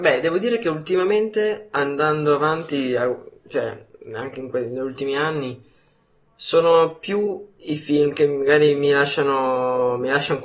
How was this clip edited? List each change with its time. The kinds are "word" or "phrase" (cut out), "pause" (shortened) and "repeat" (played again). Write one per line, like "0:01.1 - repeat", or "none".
none